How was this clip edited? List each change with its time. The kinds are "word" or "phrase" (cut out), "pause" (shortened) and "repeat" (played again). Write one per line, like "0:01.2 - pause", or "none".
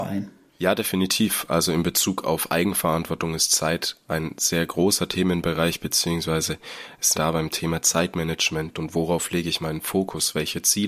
0:07.1 - phrase